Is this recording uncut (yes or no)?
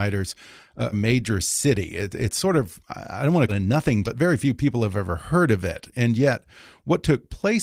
no